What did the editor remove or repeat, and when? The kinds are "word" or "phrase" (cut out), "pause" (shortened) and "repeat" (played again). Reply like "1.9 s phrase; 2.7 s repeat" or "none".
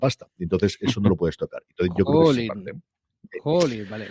none